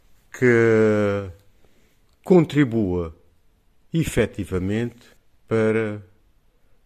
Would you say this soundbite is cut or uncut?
uncut